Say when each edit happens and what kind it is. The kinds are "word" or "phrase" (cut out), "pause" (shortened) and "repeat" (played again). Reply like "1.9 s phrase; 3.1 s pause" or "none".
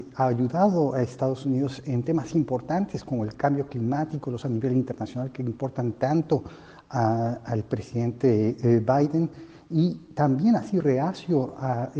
4.4 s word; 10.8 s word